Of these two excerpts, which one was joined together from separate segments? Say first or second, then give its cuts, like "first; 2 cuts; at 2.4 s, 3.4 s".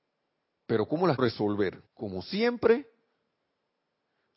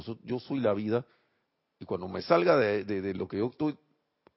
first; 2 cuts; at 1.2 s, 1.9 s